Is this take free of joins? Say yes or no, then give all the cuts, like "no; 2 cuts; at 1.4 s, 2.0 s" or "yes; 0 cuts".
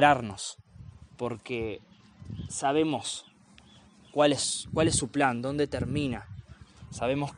yes; 0 cuts